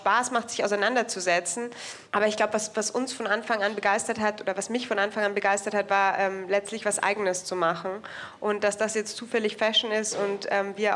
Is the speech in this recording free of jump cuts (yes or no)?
no